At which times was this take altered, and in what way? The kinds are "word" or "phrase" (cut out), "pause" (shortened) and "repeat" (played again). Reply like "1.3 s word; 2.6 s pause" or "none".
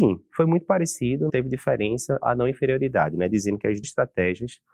1.3 s word; 2.2 s word; 3.8 s word